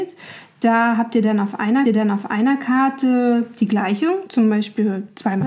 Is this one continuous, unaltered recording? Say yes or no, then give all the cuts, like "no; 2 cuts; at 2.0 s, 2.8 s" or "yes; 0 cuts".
no; 1 cut; at 1.9 s